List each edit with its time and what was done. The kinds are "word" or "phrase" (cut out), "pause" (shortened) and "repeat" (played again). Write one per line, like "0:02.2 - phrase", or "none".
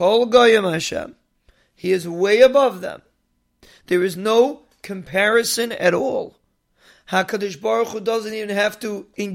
none